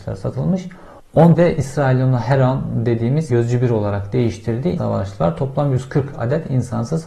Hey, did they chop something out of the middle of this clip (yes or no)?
yes